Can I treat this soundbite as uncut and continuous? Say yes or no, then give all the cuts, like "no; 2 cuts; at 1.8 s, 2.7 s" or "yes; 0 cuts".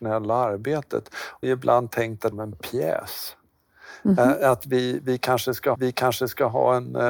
no; 3 cuts; at 1.4 s, 2.3 s, 5.7 s